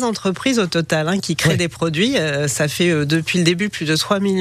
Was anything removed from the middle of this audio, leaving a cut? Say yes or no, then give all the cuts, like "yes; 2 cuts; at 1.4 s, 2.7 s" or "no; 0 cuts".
no; 0 cuts